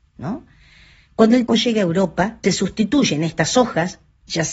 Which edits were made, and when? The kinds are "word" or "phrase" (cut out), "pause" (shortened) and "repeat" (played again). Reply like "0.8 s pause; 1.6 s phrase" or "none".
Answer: 1.5 s word; 2.4 s word